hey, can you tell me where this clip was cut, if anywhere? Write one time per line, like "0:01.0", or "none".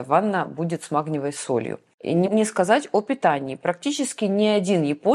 0:02.3

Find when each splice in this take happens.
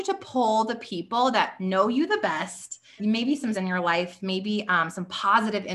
0:03.0
0:03.5

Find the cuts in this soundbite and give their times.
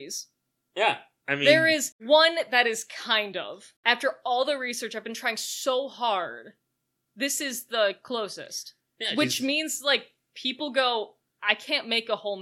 0:03.8

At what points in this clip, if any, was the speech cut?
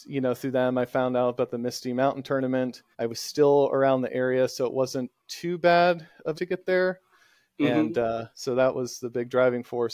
0:02.9
0:06.3
0:08.3

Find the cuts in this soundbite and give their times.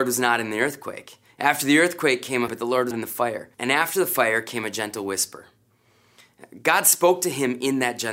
0:02.5
0:02.9
0:03.5

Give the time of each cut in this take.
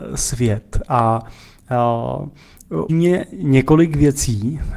0:02.9

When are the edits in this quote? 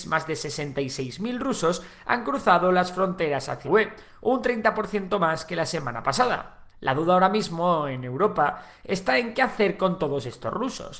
0:03.6
0:06.7

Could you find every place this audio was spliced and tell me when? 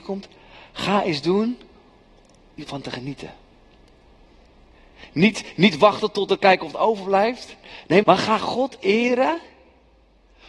0:02.7
0:06.7
0:08.0
0:08.4

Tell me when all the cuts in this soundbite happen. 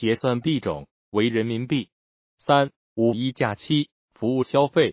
none

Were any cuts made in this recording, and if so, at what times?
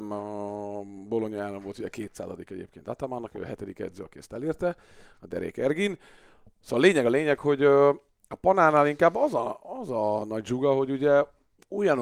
none

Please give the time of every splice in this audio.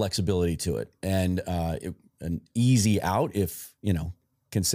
none

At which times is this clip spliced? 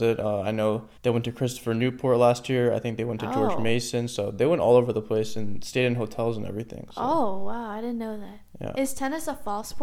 0:01.0

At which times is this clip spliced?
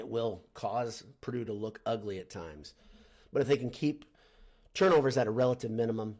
none

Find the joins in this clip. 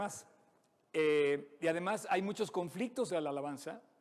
0:03.1

